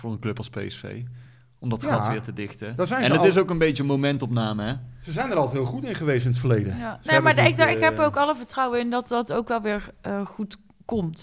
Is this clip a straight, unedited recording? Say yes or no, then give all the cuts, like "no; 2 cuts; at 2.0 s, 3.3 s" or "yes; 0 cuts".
yes; 0 cuts